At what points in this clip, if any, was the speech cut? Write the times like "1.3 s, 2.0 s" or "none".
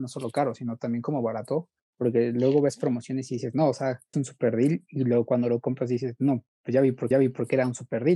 1.8 s, 4.1 s, 7.1 s